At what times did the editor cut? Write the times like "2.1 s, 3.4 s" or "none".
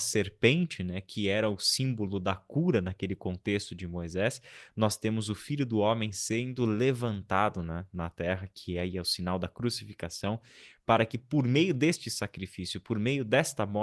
none